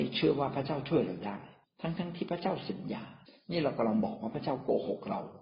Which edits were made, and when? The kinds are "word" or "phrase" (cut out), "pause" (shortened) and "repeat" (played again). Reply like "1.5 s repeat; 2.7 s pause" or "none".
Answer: 1.6 s pause; 3.3 s pause